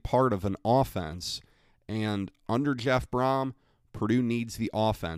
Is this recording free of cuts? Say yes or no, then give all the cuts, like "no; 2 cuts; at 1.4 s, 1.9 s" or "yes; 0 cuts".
yes; 0 cuts